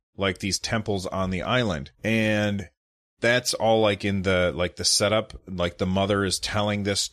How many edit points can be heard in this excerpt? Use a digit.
1